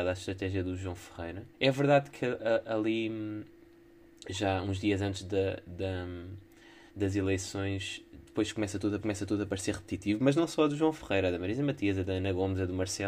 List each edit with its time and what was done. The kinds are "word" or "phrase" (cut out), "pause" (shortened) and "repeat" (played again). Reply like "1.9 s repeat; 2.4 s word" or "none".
1.5 s pause; 6.9 s pause; 9.0 s repeat